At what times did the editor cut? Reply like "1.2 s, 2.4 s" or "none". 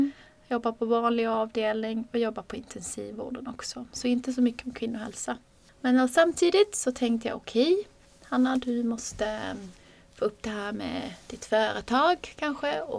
none